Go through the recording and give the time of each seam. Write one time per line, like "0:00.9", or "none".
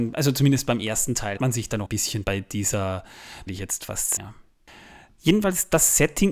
0:01.4
0:01.9
0:02.2
0:03.5
0:04.2